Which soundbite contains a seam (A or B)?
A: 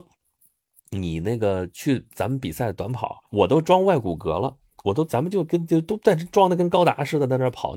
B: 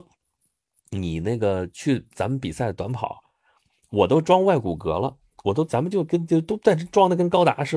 A